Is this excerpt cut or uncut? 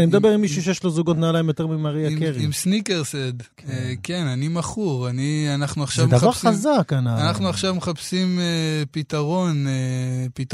cut